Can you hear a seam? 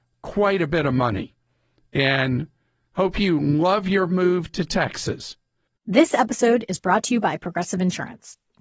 no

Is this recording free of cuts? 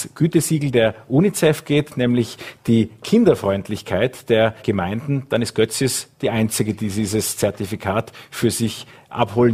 no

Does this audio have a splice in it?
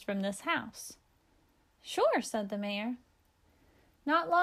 no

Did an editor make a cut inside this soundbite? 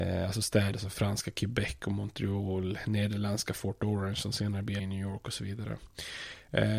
yes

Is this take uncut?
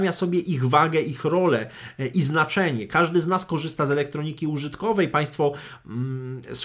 yes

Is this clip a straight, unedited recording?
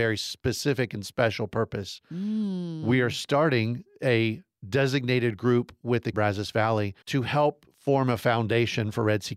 no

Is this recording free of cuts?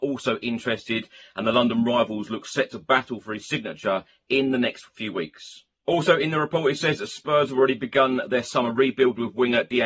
no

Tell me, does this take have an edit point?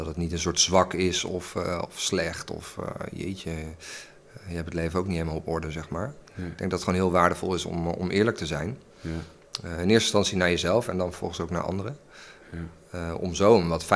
no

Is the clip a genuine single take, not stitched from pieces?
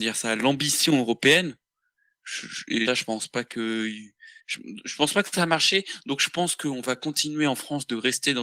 no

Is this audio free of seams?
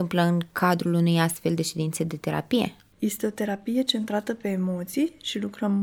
yes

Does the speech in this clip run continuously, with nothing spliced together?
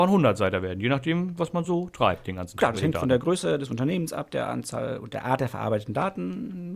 yes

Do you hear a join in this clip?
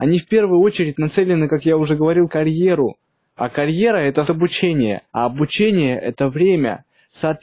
yes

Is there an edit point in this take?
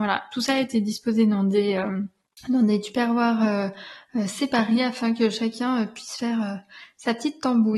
no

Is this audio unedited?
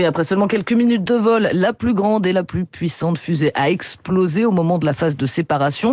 yes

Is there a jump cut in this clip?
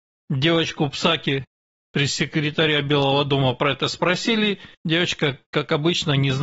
yes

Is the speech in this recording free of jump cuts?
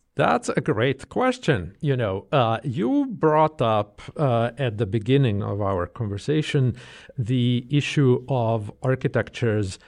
yes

